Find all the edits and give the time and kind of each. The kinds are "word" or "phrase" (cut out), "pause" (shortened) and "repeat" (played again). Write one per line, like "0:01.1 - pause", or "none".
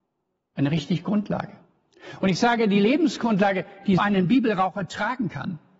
0:01.0 - word
0:04.0 - word

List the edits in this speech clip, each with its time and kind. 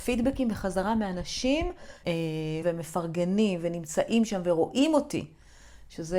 0:02.0 - phrase
0:02.6 - word

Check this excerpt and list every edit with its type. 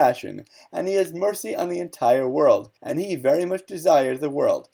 0:02.8 - pause

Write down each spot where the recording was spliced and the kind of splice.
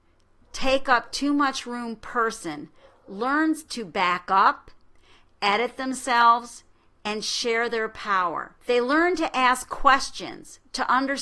0:08.6 - pause

